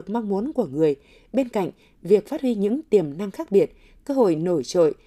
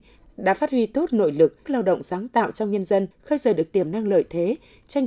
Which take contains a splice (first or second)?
second